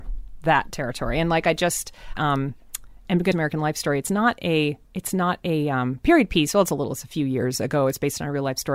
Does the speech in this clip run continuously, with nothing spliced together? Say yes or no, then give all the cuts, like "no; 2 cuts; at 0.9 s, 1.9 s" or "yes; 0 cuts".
no; 3 cuts; at 2.2 s, 3.3 s, 4.8 s